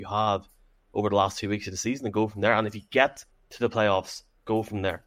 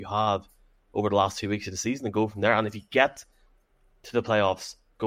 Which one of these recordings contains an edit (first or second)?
first